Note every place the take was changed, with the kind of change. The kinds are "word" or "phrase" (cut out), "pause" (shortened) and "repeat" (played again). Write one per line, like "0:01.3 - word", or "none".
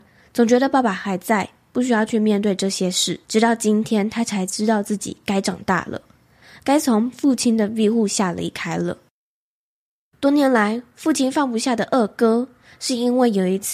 0:03.2 - pause